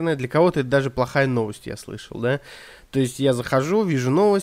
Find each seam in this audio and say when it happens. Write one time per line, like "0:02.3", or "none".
none

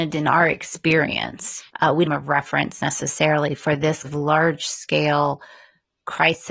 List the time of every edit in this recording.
0:01.7
0:02.1
0:04.0

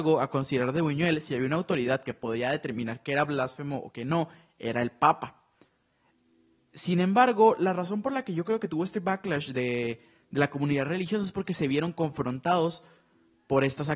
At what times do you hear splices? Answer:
none

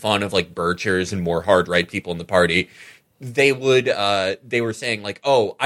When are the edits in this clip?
none

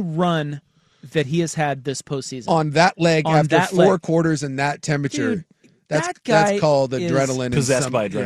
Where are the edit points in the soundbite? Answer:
none

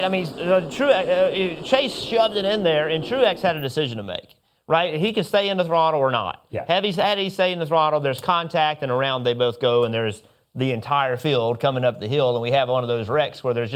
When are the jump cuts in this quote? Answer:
none

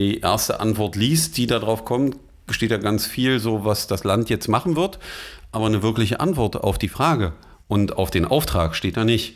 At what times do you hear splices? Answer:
none

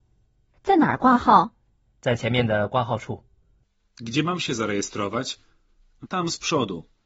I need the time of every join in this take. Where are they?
0:06.0

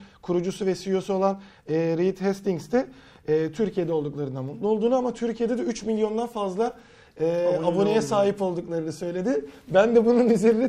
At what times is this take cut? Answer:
none

